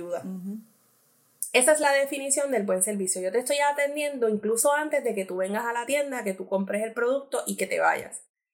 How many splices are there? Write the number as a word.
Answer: zero